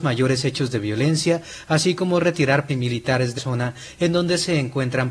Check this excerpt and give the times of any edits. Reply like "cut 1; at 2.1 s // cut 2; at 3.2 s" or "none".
cut 1; at 2.7 s // cut 2; at 3.4 s